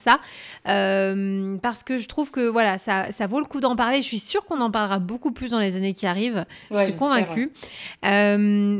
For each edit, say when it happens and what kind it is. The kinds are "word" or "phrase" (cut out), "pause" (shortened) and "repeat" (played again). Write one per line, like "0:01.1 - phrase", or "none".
none